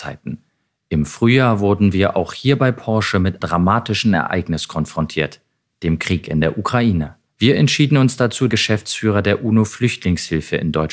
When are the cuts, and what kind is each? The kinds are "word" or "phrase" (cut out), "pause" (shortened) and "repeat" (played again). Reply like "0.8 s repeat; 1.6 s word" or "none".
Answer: 3.4 s word; 7.3 s pause; 8.5 s word